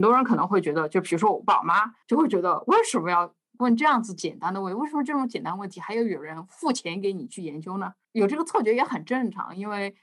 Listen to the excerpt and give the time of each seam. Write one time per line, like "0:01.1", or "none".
0:02.0
0:08.0